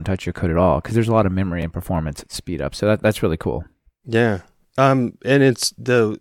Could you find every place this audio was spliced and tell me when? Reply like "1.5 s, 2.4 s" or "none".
none